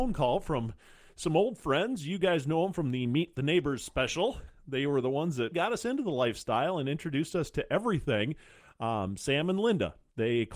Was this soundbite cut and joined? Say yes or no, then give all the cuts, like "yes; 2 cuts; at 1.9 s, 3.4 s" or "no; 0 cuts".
yes; 1 cut; at 5.5 s